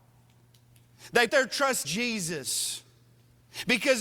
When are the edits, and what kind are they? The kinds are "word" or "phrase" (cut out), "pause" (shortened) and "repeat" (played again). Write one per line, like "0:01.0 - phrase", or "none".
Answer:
0:01.3 - word
0:01.8 - word